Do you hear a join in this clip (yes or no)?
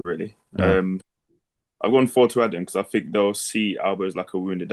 no